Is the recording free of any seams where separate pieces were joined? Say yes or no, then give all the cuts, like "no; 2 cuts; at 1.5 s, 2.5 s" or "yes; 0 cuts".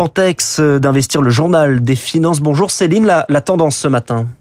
yes; 0 cuts